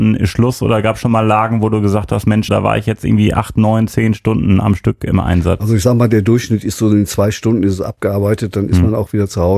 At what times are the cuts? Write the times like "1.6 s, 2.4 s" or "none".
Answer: 2.5 s